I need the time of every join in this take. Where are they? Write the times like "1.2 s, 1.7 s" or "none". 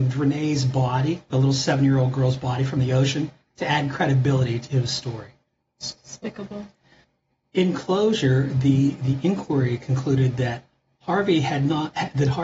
none